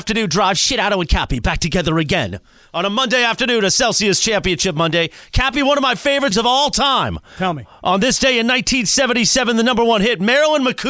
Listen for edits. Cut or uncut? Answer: cut